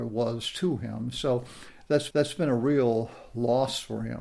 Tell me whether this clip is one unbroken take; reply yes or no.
no